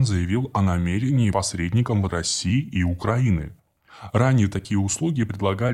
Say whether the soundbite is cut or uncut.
cut